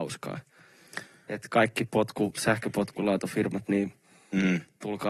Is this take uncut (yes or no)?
yes